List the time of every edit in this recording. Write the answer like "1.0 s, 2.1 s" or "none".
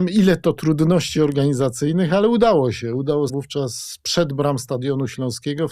3.3 s